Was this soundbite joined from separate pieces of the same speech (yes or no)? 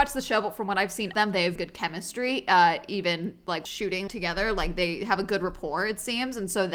yes